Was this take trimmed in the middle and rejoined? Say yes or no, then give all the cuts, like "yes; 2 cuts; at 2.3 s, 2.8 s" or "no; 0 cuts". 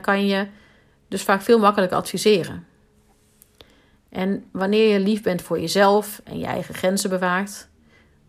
no; 0 cuts